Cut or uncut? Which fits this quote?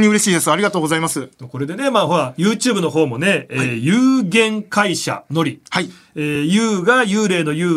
uncut